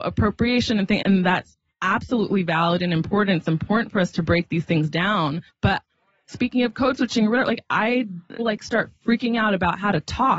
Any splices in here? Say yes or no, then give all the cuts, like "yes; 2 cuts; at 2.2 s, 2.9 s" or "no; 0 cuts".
yes; 3 cuts; at 1.0 s, 5.5 s, 8.4 s